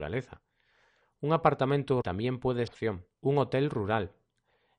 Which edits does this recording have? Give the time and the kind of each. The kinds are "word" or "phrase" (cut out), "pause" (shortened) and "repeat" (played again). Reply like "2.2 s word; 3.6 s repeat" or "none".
2.0 s word; 2.7 s phrase; 3.1 s pause